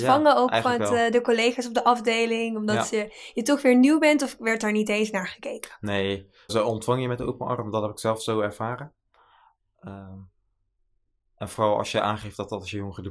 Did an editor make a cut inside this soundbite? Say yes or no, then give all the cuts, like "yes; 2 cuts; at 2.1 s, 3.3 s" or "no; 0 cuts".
yes; 1 cut; at 6.5 s